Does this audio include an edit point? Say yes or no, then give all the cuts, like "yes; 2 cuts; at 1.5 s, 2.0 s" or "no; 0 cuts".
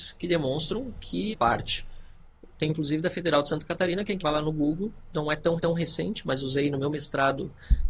yes; 4 cuts; at 1.3 s, 2.7 s, 4.2 s, 5.6 s